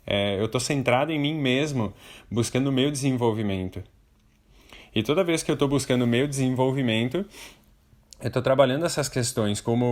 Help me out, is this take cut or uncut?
uncut